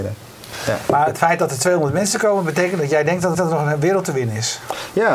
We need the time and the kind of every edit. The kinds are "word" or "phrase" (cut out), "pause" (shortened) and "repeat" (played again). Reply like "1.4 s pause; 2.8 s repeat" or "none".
3.3 s repeat

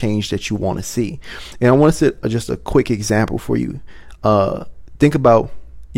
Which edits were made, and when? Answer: none

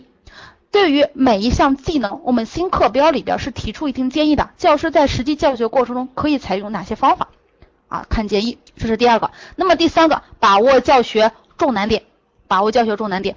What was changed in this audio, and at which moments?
8.7 s pause

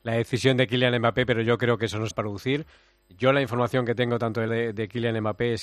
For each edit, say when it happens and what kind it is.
2.1 s word; 4.5 s word

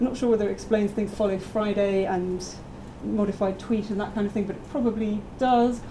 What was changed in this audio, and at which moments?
1.1 s word; 3.0 s word

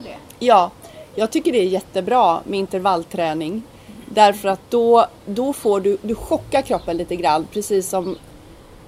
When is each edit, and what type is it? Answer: 5.2 s word

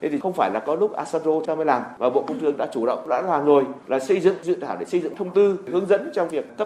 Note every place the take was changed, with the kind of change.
1.5 s phrase

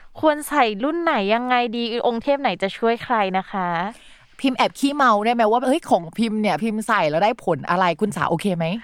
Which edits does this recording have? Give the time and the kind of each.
none

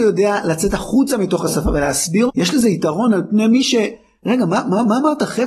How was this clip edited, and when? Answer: 2.3 s word

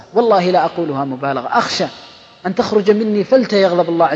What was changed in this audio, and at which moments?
none

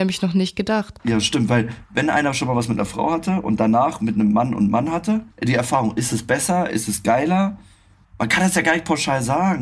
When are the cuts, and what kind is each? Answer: 5.3 s pause

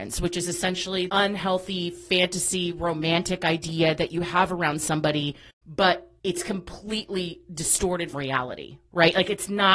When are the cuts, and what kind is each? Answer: 1.1 s word; 8.1 s word

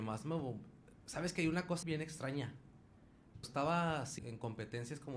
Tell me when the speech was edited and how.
1.8 s word; 3.4 s word; 4.2 s word

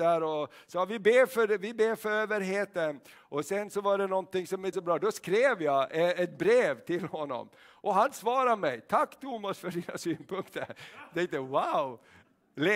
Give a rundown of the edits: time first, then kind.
4.7 s word

